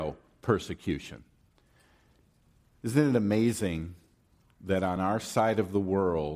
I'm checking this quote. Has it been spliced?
no; 0 cuts

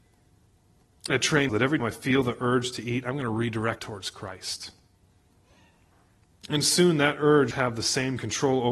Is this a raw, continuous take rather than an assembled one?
no; 5 cuts; at 1.1 s, 1.5 s, 1.8 s, 3.8 s, 7.5 s

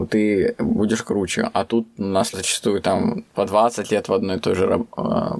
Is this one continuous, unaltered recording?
no; 1 cut; at 2.3 s

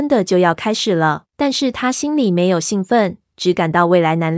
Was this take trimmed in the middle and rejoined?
yes; 1 cut; at 1.3 s

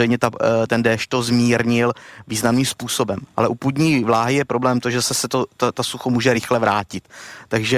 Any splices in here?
no; 0 cuts

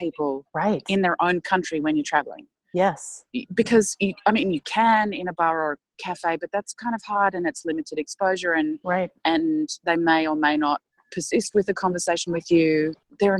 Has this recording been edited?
no; 0 cuts

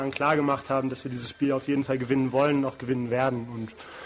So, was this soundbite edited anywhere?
no; 0 cuts

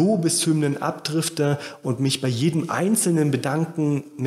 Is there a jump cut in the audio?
no; 0 cuts

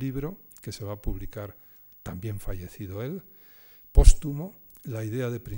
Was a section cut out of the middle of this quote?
no; 0 cuts

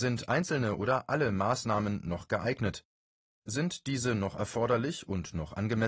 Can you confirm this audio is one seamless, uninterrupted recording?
yes; 0 cuts

